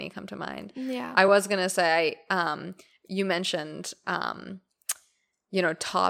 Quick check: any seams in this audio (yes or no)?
no